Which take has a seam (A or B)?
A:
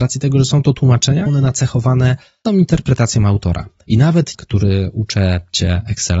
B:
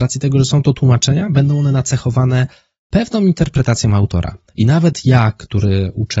A